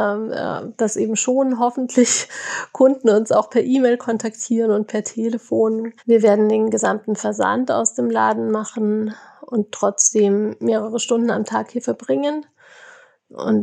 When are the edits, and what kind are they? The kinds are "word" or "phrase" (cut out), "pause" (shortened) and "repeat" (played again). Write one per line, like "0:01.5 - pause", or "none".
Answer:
0:06.0 - pause